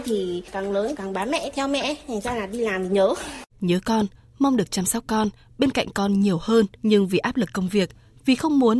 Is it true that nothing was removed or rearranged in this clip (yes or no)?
no